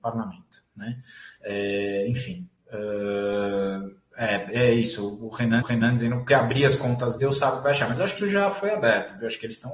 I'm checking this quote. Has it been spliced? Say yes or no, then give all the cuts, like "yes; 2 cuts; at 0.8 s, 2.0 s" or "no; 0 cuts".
yes; 6 cuts; at 1.4 s, 4.1 s, 5.6 s, 6.3 s, 7.2 s, 8.2 s